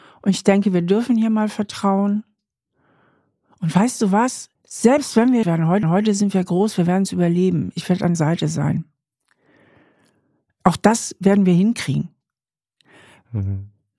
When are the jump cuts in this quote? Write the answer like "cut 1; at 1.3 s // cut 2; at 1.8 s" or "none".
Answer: cut 1; at 4.6 s // cut 2; at 5.4 s // cut 3; at 5.8 s // cut 4; at 8.1 s